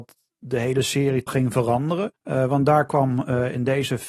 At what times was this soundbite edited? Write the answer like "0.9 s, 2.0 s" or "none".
1.3 s, 2.2 s